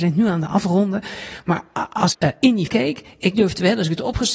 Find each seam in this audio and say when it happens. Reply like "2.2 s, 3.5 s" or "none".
2.1 s, 2.7 s